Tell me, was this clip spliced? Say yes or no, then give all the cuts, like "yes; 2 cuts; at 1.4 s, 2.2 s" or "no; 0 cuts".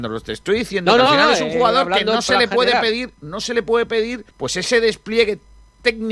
yes; 1 cut; at 4.3 s